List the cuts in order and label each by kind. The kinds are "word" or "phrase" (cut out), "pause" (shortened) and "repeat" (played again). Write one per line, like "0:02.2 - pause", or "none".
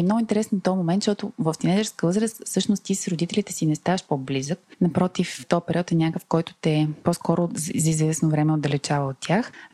none